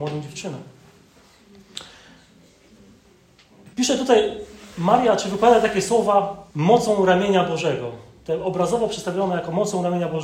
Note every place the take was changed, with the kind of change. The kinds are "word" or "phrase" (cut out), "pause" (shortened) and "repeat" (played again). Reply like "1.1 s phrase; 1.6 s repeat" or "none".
3.7 s pause; 6.5 s pause